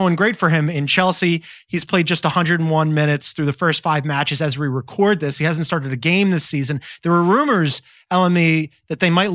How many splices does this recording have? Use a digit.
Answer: 0